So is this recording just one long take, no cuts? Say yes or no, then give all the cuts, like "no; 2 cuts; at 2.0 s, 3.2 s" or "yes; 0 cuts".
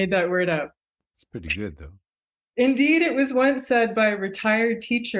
yes; 0 cuts